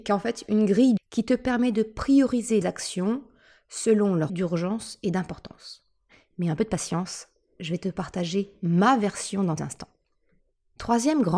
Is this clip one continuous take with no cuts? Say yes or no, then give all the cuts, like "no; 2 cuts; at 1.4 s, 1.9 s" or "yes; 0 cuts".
no; 4 cuts; at 1.0 s, 2.6 s, 4.3 s, 9.6 s